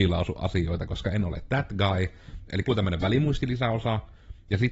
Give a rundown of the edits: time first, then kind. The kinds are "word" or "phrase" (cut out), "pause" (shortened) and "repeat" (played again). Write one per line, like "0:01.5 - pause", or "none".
0:02.7 - word